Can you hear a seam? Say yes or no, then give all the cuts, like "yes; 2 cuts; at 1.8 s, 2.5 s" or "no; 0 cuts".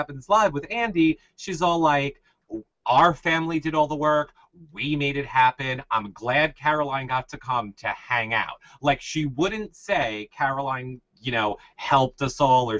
no; 0 cuts